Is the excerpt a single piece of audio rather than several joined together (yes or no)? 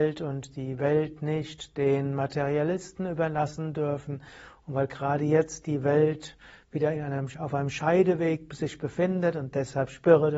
yes